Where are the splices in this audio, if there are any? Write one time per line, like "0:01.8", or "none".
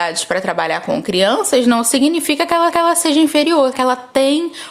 0:02.7
0:03.7